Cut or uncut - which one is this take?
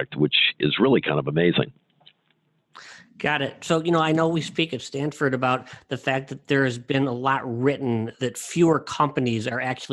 uncut